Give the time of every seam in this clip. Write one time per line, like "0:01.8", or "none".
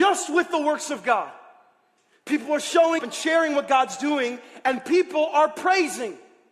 0:03.0